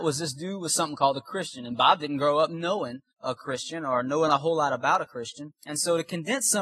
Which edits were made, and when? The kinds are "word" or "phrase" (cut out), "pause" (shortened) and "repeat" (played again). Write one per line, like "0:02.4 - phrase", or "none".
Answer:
0:03.1 - pause
0:05.6 - pause